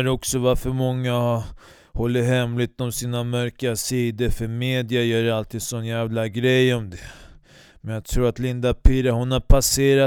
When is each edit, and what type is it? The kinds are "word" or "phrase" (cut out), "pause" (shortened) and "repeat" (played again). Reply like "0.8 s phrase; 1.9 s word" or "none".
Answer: none